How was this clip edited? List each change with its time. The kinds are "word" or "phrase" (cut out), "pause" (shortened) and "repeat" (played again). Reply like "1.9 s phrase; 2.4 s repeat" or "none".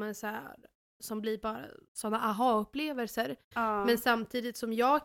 none